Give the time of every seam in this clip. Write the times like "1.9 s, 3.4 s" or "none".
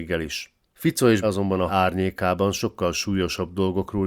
1.2 s, 1.7 s